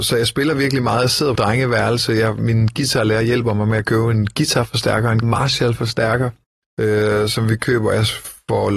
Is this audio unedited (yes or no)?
no